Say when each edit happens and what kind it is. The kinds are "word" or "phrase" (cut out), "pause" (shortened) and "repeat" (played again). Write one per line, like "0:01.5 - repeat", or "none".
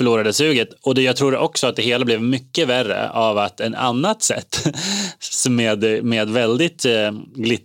none